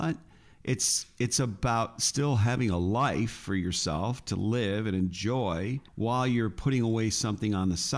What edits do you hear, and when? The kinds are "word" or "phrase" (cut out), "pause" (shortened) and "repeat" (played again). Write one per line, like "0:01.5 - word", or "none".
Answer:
0:05.9 - pause